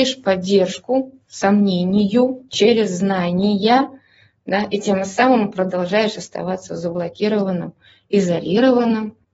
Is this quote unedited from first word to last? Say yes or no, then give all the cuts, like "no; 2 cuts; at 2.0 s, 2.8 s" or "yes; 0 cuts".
yes; 0 cuts